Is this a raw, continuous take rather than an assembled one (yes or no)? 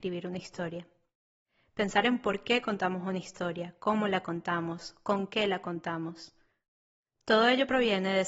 yes